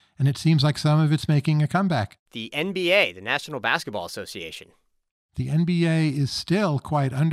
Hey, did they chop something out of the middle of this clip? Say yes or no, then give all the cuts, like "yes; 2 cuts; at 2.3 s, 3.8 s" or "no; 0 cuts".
yes; 1 cut; at 2.3 s